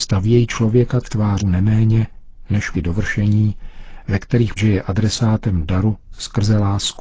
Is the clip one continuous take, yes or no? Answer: no